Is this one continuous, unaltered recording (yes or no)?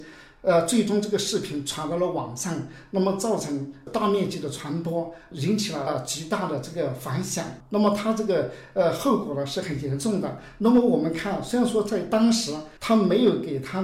no